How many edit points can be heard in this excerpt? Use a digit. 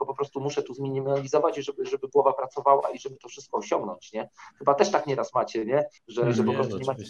1